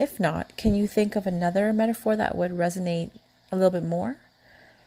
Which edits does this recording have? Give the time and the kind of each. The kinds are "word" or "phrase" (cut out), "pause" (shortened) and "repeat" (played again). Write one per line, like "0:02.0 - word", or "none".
none